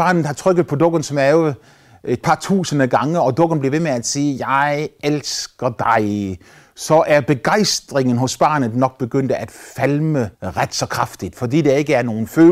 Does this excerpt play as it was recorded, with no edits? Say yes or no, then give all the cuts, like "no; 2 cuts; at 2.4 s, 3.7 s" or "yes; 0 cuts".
no; 1 cut; at 10.3 s